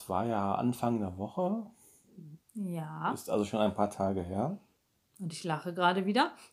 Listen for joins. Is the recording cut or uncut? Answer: uncut